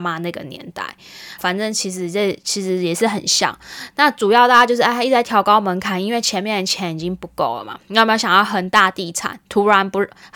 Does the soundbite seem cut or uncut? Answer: cut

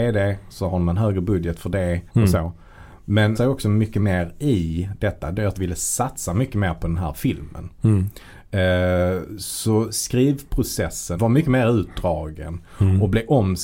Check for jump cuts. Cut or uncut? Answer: cut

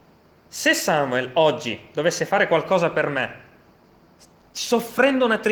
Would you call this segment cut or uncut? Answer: uncut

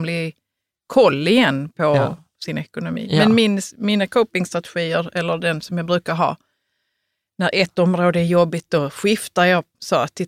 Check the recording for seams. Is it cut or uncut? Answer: uncut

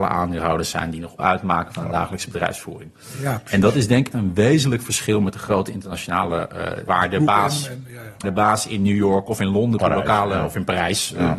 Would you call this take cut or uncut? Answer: cut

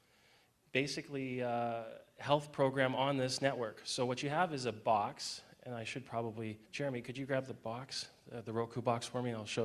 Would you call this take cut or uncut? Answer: cut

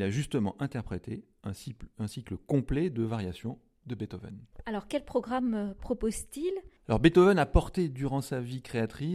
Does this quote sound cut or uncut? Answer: cut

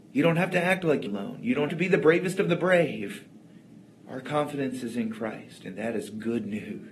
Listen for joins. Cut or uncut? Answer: cut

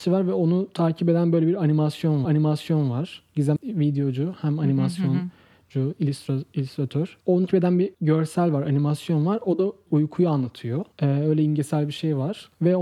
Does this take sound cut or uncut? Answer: cut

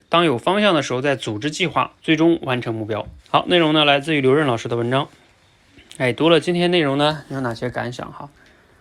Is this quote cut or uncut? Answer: cut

